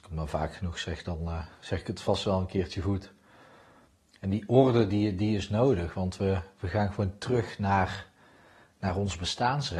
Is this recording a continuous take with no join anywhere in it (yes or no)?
yes